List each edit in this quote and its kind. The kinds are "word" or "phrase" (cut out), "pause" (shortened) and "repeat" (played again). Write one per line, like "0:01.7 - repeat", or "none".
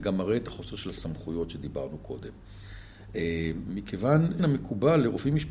0:04.4 - word